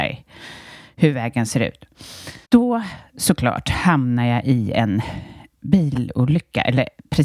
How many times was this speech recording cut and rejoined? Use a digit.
1